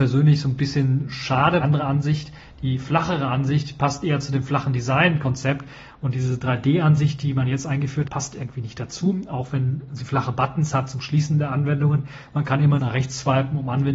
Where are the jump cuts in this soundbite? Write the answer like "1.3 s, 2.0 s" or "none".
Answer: 1.6 s, 8.1 s, 12.8 s